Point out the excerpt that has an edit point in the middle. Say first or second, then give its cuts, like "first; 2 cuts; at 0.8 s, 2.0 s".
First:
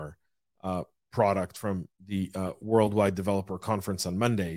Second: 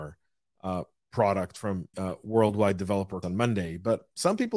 second; 2 cuts; at 1.9 s, 3.2 s